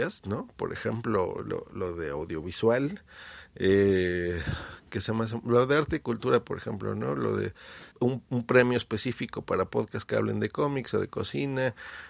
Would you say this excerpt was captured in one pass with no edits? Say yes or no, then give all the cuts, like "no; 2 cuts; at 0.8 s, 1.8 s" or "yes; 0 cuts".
no; 1 cut; at 7.9 s